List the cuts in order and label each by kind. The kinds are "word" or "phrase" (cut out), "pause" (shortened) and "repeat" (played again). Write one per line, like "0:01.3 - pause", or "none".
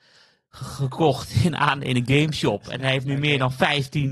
none